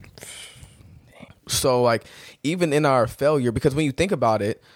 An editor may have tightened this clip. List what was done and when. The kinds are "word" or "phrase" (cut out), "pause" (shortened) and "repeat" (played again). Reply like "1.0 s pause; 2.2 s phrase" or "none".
1.3 s pause